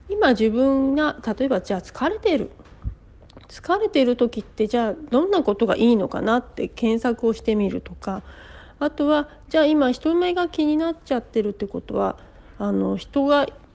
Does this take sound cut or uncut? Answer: uncut